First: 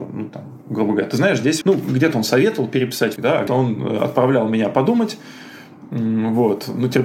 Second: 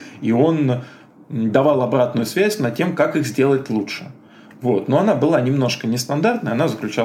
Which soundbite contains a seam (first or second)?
first